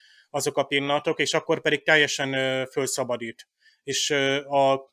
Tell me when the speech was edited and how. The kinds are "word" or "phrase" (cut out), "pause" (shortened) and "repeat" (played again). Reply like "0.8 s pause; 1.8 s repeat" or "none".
none

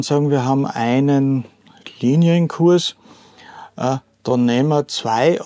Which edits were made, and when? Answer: none

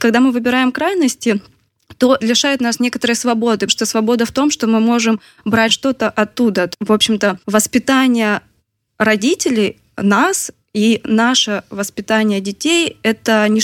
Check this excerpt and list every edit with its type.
2.2 s word; 3.7 s word; 5.7 s phrase; 6.7 s word; 7.4 s pause

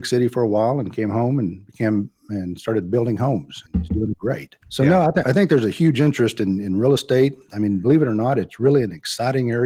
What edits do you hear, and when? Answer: 3.7 s word; 4.6 s pause; 5.2 s word

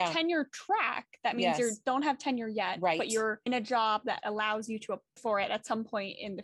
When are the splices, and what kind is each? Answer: 3.5 s word; 5.2 s word

